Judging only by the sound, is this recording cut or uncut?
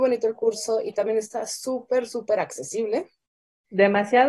uncut